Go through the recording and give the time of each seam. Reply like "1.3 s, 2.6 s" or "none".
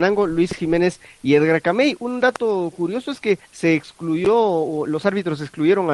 3.5 s